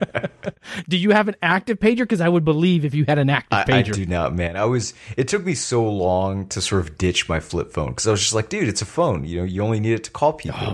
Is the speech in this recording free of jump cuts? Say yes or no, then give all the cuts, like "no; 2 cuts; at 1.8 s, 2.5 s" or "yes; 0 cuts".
yes; 0 cuts